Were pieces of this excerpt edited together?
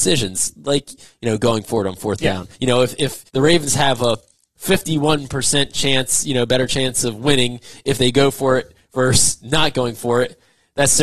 yes; 2 cuts; at 2.5 s, 3.3 s

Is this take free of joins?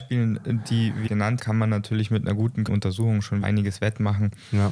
no; 4 cuts; at 1.1 s, 1.4 s, 2.7 s, 3.4 s

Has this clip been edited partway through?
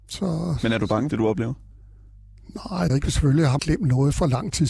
yes; 3 cuts; at 1.1 s, 2.9 s, 3.6 s

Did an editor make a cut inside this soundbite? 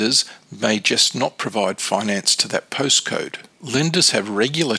yes; 1 cut; at 3.5 s

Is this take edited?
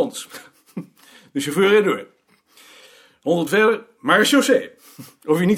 yes; 1 cut; at 3.5 s

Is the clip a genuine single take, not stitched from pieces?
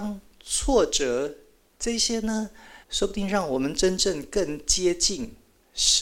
no; 1 cut; at 2.8 s

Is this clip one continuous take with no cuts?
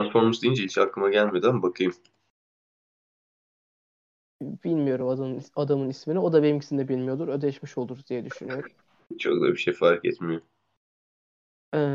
yes; 0 cuts

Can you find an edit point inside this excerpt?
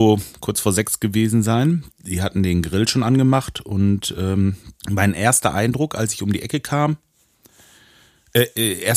yes; 2 cuts; at 1.9 s, 4.8 s

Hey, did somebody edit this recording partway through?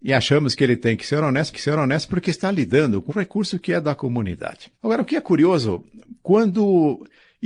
yes; 3 cuts; at 1.5 s, 3.1 s, 4.7 s

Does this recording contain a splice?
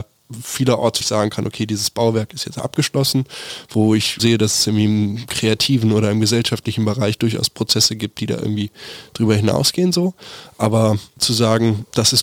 yes; 2 cuts; at 1.0 s, 4.2 s

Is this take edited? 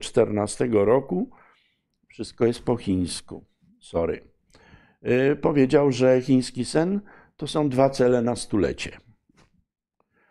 no; 0 cuts

